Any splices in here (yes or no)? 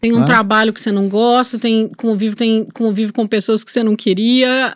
yes